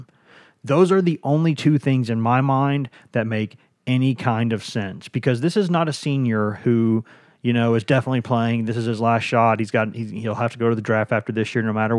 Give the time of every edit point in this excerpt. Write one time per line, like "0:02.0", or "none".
none